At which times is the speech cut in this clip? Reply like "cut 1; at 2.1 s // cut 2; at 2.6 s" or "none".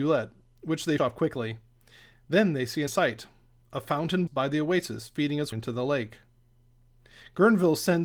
cut 1; at 1.0 s // cut 2; at 2.9 s // cut 3; at 4.3 s // cut 4; at 5.5 s